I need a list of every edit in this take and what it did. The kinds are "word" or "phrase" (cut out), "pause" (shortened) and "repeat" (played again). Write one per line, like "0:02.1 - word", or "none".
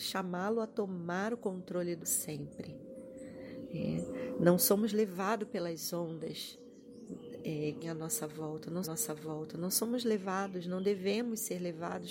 0:02.0 - word
0:07.8 - phrase
0:08.8 - repeat